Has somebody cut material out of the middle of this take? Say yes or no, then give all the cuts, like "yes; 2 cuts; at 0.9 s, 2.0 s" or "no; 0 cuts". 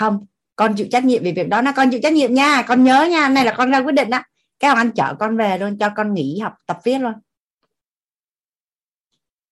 no; 0 cuts